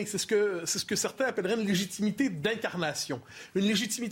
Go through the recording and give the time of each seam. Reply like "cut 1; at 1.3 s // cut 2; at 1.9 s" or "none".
none